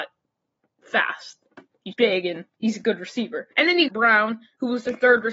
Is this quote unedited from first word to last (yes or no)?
no